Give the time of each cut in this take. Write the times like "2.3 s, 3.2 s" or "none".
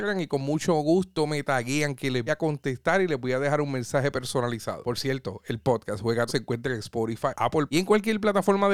2.3 s, 6.3 s, 7.7 s